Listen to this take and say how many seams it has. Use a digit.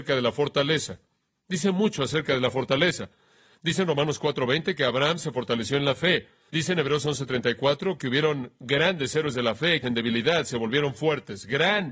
1